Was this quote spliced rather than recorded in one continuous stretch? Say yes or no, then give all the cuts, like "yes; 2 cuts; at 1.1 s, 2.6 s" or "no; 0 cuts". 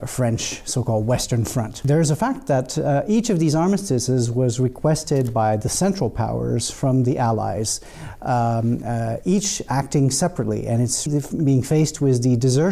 yes; 1 cut; at 11.1 s